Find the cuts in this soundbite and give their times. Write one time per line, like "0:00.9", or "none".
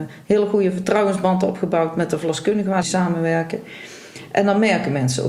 0:02.8